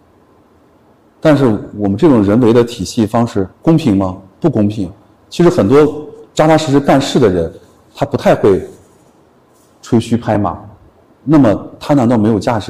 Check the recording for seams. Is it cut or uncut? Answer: cut